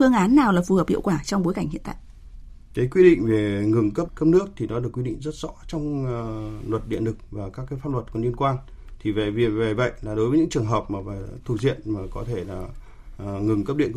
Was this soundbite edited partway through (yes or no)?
yes